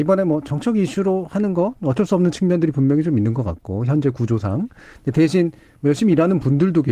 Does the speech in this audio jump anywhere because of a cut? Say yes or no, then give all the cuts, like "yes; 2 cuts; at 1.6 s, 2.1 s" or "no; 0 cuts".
no; 0 cuts